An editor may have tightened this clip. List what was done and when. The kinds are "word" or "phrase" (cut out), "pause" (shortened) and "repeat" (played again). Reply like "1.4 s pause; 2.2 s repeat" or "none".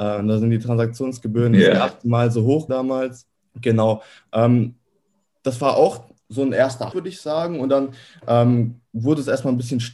2.7 s word; 3.4 s pause; 6.9 s word